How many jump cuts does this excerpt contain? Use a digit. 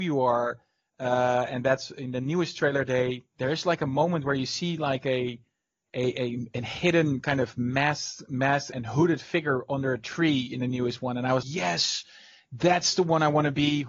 2